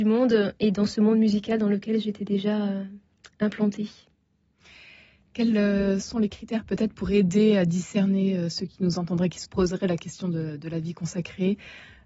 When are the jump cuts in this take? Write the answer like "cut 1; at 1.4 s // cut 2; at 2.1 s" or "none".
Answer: none